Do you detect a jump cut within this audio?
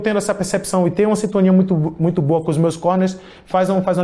no; 0 cuts

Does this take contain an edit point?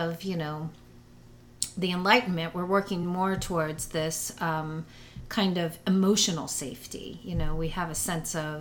no; 0 cuts

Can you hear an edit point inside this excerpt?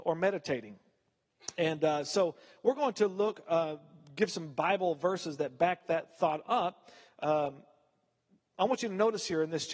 no; 0 cuts

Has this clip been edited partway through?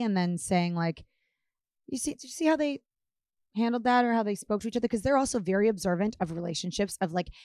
no; 0 cuts

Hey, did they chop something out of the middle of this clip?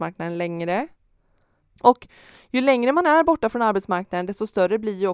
no; 0 cuts

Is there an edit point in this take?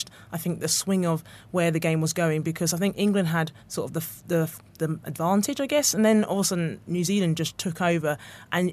yes; 2 cuts; at 3.6 s, 4.7 s

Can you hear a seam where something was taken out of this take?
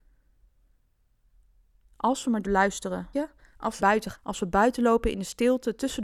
yes; 4 cuts; at 2.4 s, 3.1 s, 3.8 s, 4.1 s

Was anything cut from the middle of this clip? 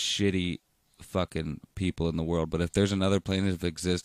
no; 0 cuts

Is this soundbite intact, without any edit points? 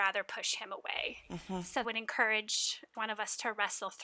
no; 2 cuts; at 1.8 s, 2.9 s

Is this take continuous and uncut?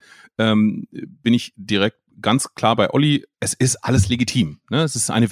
no; 1 cut; at 3.3 s

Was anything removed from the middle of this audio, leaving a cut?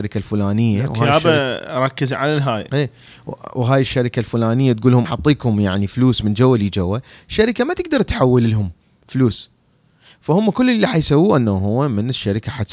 yes; 2 cuts; at 2.7 s, 5.0 s

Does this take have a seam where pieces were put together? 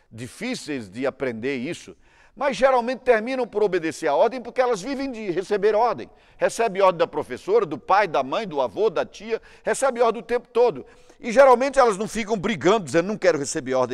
no; 0 cuts

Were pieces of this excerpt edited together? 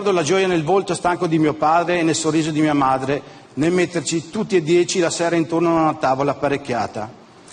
no; 0 cuts

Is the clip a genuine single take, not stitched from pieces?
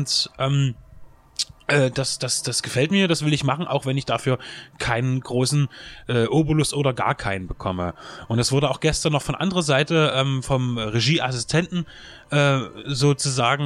yes; 0 cuts

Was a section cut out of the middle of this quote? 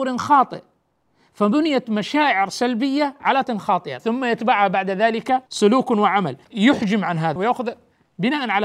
yes; 5 cuts; at 3.4 s, 4.0 s, 5.5 s, 6.4 s, 7.4 s

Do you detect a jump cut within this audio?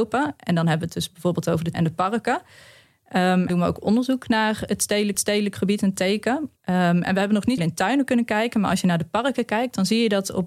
yes; 5 cuts; at 1.7 s, 3.5 s, 5.1 s, 6.6 s, 7.6 s

